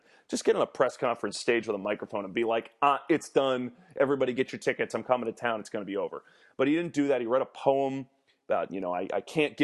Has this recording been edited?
no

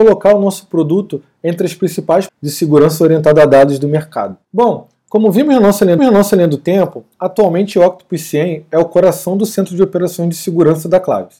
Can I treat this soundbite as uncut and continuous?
no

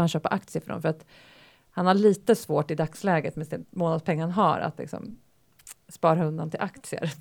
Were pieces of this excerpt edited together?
yes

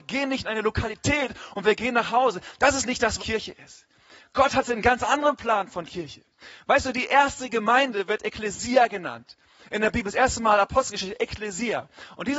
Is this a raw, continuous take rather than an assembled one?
no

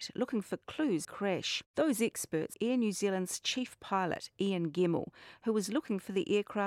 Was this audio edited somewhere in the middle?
yes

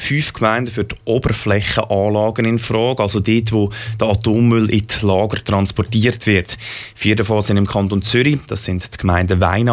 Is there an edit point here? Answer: no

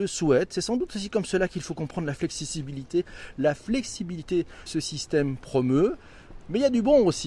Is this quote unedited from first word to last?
no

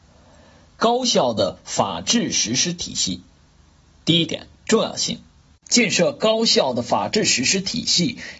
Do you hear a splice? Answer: yes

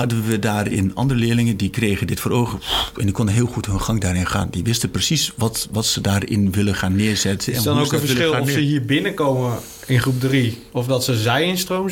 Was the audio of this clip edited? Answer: no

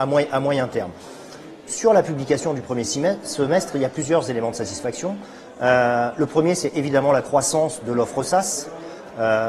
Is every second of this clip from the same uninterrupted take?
yes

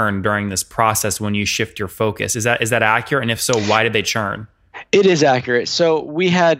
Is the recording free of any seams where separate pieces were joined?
yes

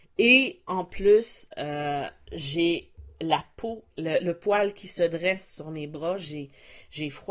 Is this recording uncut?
no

